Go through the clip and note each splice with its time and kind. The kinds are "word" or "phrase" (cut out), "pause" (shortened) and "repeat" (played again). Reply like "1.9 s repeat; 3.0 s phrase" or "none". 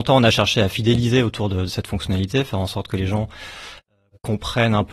none